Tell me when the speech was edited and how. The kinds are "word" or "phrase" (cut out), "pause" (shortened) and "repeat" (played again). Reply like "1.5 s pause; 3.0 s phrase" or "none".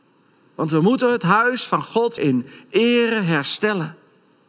2.2 s word